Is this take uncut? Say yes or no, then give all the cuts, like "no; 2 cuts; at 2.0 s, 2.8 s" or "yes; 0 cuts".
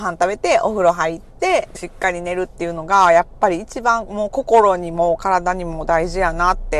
no; 1 cut; at 1.7 s